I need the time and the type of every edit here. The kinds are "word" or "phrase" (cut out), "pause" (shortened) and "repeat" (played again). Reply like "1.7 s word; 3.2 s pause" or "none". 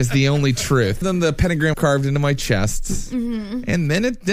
1.0 s phrase; 1.7 s word